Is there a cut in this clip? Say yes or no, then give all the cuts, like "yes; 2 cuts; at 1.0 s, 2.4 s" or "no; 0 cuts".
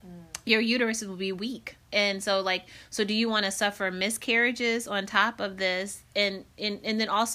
yes; 1 cut; at 1.8 s